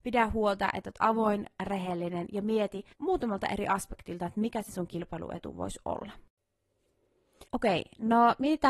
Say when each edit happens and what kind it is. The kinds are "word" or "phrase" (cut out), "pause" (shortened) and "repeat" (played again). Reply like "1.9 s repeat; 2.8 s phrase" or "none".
2.9 s pause; 7.5 s pause